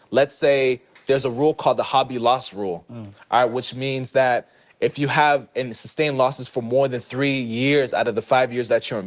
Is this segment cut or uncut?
uncut